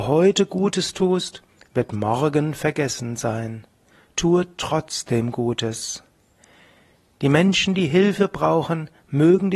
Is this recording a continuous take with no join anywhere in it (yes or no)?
yes